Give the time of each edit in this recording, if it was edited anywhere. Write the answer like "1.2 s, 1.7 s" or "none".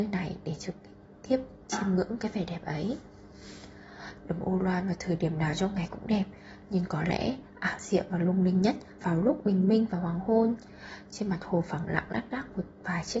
9.0 s